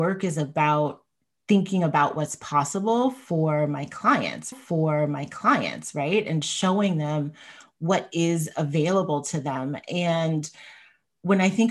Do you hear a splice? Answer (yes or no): yes